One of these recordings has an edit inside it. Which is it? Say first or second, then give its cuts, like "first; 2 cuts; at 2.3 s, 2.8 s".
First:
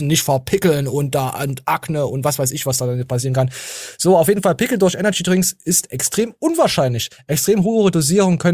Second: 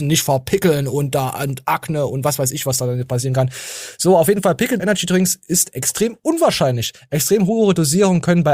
second; 1 cut; at 4.8 s